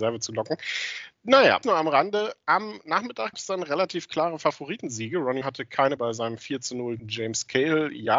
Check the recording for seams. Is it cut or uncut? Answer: cut